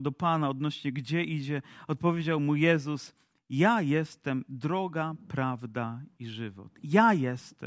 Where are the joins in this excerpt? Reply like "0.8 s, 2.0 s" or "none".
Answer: none